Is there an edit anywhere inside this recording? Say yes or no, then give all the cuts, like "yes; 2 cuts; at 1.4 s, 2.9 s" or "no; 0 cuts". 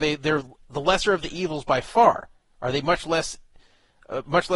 no; 0 cuts